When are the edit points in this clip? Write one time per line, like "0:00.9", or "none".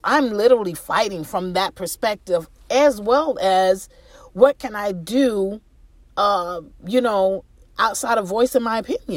none